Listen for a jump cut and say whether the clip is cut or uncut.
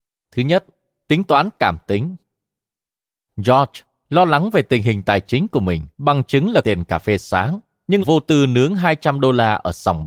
cut